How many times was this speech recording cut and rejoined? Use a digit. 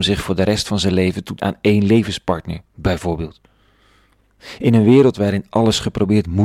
2